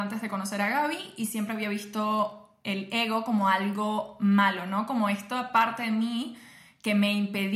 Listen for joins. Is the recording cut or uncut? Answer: uncut